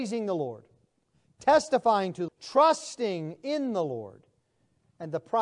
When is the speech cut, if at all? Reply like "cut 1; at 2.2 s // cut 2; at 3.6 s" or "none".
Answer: cut 1; at 2.3 s